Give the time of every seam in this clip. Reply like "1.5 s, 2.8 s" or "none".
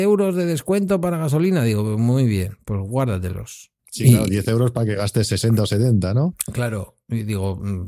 3.8 s

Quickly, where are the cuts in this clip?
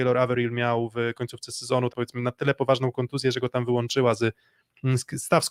1.9 s

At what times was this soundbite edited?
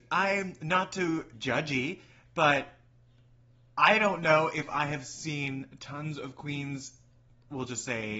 1.3 s

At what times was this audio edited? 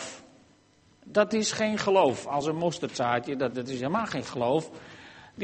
3.5 s

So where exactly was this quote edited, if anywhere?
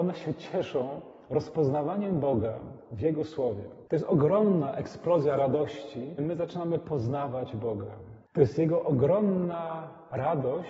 3.9 s, 6.2 s, 8.3 s

